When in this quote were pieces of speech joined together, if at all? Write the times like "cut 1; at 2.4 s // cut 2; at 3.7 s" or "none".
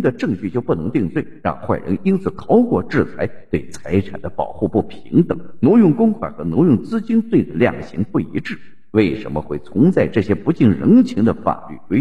none